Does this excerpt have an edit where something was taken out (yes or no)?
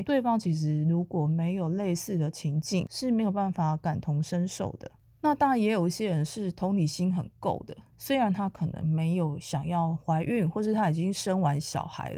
no